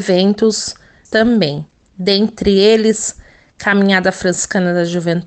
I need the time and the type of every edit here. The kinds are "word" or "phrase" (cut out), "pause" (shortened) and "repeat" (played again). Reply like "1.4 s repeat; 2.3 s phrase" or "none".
1.1 s word